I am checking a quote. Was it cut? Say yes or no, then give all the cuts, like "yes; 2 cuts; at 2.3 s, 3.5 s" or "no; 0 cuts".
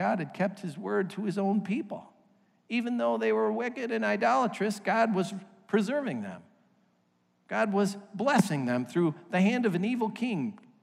no; 0 cuts